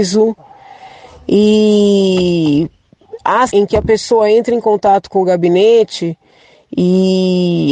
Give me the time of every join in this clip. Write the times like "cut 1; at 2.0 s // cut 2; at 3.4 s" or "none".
cut 1; at 3.5 s